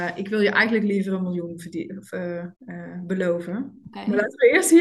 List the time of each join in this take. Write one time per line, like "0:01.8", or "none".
0:02.6